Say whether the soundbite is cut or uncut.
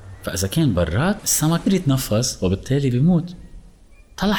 cut